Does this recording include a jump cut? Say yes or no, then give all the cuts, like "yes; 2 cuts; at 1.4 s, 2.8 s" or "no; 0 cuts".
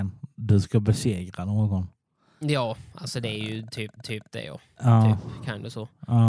yes; 1 cut; at 4.0 s